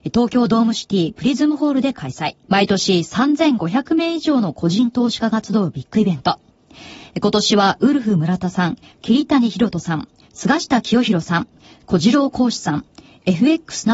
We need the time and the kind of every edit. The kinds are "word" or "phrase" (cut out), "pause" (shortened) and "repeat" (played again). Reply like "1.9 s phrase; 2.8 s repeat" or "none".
2.4 s pause